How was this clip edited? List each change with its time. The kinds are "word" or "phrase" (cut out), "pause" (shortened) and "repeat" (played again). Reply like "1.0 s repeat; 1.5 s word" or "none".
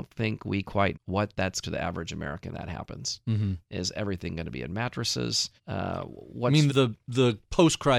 0.9 s word; 1.6 s phrase; 2.5 s word; 5.6 s pause; 6.7 s word